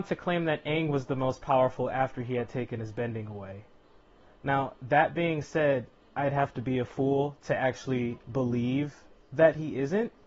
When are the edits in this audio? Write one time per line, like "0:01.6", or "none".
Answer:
none